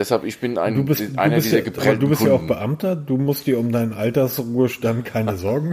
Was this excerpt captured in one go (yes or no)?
yes